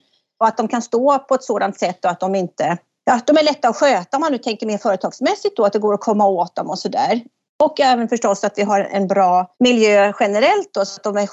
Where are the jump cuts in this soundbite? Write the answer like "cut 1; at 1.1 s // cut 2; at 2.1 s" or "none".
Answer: cut 1; at 9.5 s